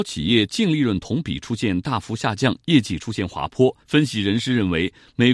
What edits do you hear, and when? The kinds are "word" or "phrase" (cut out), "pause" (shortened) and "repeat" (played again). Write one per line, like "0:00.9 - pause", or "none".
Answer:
0:03.8 - pause